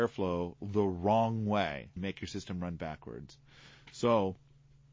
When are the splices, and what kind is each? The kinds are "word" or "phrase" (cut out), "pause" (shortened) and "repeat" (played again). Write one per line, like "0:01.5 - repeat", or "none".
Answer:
0:02.0 - word